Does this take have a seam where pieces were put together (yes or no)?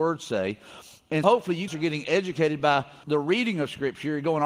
yes